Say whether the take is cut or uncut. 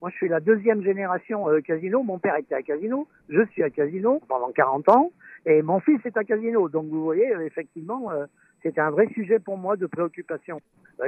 uncut